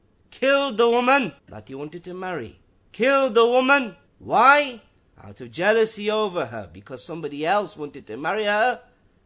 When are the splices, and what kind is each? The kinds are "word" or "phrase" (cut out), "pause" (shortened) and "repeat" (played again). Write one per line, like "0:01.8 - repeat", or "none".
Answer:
0:01.4 - pause
0:02.7 - pause
0:04.1 - pause